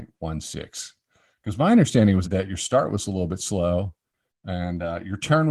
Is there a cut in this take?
yes; 1 cut; at 2.2 s

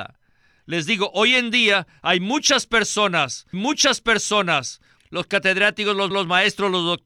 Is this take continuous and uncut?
no; 2 cuts; at 3.5 s, 6.1 s

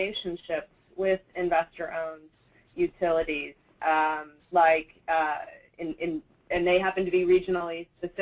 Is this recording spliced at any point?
no; 0 cuts

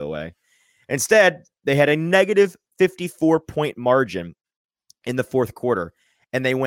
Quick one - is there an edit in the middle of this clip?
no; 0 cuts

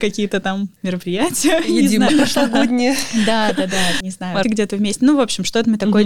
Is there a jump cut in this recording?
yes; 3 cuts; at 2.1 s, 4.0 s, 4.4 s

